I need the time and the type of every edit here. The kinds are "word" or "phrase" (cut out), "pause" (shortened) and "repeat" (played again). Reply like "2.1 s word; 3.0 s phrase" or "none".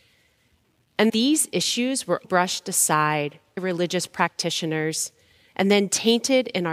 1.1 s word; 2.2 s word; 3.6 s word